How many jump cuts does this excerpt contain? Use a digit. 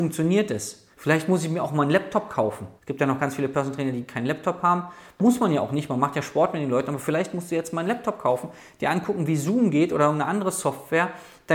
2